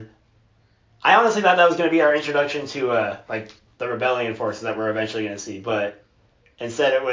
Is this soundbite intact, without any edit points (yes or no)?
yes